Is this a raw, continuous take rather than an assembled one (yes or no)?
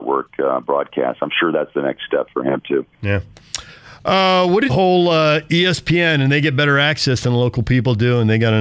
no